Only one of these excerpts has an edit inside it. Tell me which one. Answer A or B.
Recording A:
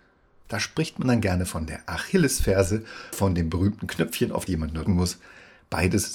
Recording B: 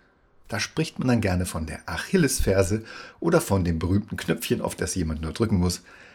A